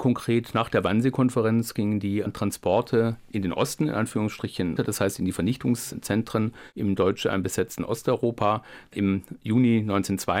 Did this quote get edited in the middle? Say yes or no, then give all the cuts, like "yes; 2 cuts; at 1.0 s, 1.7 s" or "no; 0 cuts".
yes; 1 cut; at 4.8 s